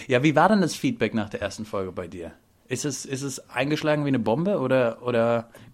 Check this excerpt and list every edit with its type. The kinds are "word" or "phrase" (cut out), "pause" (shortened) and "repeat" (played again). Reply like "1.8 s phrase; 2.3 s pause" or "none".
none